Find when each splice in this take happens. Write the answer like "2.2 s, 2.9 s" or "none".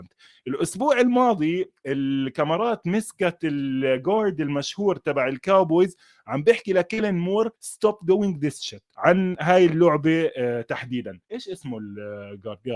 7.6 s, 11.2 s